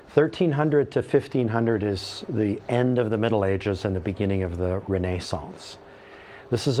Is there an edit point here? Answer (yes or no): no